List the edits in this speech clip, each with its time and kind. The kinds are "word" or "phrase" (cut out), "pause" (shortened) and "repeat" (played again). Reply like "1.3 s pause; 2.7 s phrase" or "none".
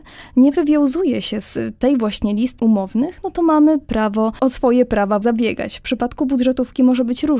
2.6 s phrase; 5.2 s word